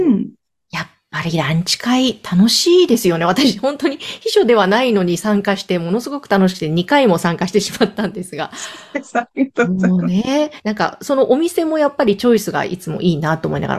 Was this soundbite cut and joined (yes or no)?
yes